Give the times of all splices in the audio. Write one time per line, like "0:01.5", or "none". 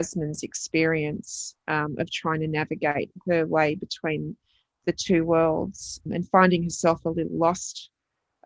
0:06.1